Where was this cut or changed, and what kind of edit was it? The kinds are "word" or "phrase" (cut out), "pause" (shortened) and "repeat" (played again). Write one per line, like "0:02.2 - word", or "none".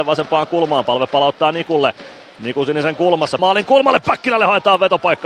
0:03.4 - word